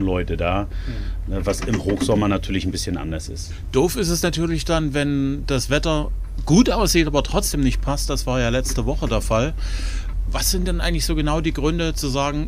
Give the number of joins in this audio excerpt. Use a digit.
0